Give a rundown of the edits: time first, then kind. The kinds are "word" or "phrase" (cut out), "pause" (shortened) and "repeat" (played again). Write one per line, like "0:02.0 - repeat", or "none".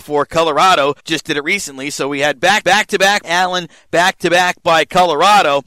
0:01.0 - pause
0:02.6 - repeat
0:03.2 - word